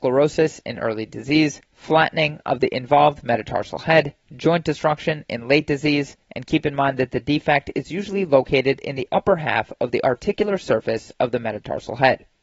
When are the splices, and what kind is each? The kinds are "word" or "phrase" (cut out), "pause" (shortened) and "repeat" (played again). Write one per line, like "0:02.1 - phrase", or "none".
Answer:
0:01.6 - pause
0:04.2 - pause
0:06.2 - pause